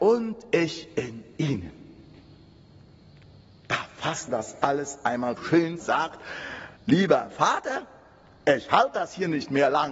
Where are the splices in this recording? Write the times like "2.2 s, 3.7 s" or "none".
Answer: 4.3 s, 5.4 s, 5.8 s, 6.8 s